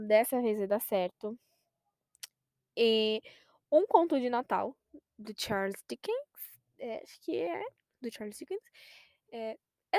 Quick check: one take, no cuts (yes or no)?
yes